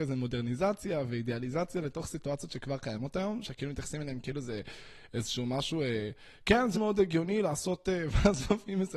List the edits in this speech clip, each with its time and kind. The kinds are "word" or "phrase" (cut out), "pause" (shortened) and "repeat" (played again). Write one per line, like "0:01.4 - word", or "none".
0:06.7 - word